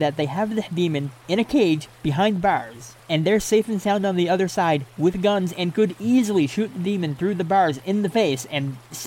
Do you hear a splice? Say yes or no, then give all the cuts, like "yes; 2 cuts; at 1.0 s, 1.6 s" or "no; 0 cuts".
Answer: no; 0 cuts